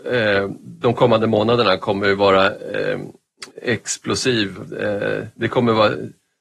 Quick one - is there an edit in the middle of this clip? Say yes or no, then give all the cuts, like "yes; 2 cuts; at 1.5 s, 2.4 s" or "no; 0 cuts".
yes; 1 cut; at 3.5 s